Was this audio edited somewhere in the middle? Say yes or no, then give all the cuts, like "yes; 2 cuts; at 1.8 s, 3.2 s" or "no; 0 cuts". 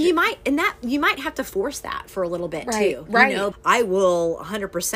yes; 1 cut; at 3.5 s